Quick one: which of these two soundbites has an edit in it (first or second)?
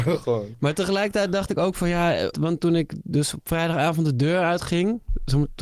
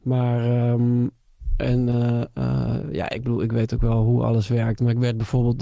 first